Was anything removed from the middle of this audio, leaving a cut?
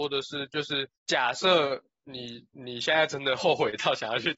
yes; 1 cut; at 1.0 s

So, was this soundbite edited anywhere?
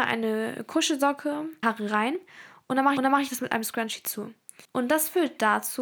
yes; 3 cuts; at 1.6 s, 3.0 s, 4.6 s

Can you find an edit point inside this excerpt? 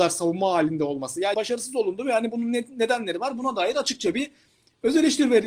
yes; 1 cut; at 1.3 s

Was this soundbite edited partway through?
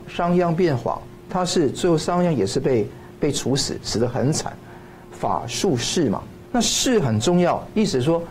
yes; 1 cut; at 6.4 s

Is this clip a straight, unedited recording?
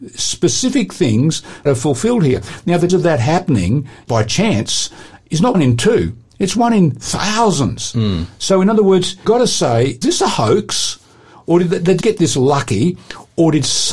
no; 7 cuts; at 1.7 s, 2.9 s, 4.1 s, 5.5 s, 9.2 s, 10.0 s, 12.0 s

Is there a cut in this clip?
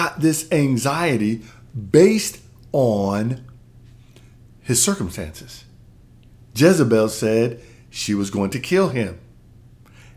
no; 0 cuts

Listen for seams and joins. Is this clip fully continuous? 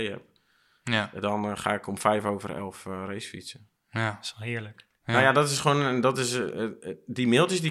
yes; 0 cuts

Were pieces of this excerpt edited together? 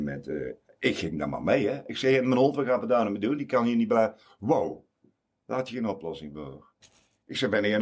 no; 0 cuts

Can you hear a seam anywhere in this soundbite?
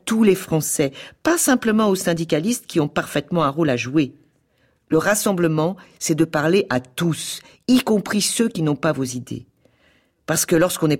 no; 0 cuts

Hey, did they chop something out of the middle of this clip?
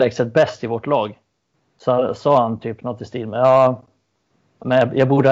yes; 1 cut; at 1.5 s

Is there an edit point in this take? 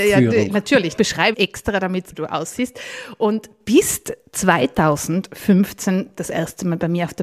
yes; 3 cuts; at 1.0 s, 1.3 s, 2.1 s

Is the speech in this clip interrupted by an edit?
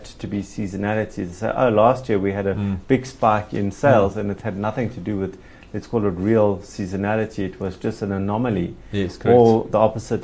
no; 0 cuts

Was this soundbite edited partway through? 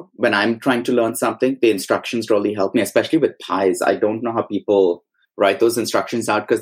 no; 0 cuts

